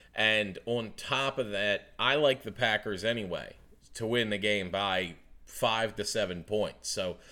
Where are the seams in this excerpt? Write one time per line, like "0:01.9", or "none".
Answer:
none